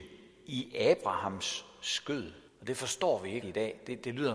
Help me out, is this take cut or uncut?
cut